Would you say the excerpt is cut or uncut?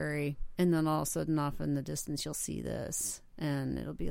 uncut